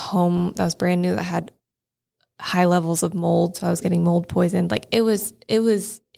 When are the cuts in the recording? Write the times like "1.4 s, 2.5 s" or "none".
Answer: none